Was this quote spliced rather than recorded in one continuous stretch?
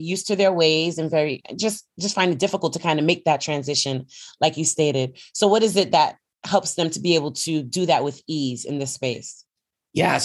no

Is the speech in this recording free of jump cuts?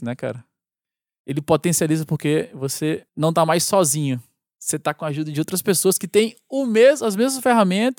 no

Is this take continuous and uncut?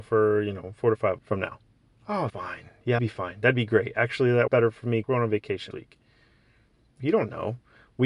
no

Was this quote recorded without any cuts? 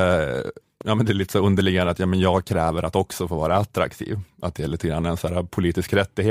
yes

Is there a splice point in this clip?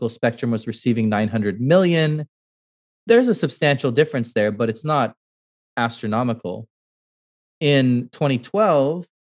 no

